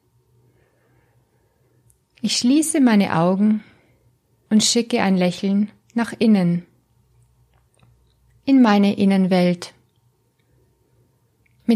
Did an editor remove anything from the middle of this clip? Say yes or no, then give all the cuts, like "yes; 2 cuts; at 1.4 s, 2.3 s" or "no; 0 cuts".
no; 0 cuts